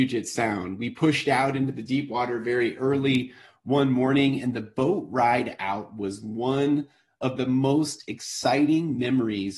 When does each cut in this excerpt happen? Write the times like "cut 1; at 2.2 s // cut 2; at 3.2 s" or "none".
none